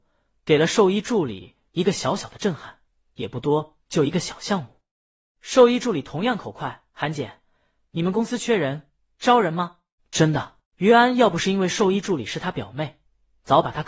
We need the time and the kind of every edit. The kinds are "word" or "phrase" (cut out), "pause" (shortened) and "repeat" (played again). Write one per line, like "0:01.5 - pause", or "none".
0:06.9 - pause
0:10.0 - pause
0:10.7 - pause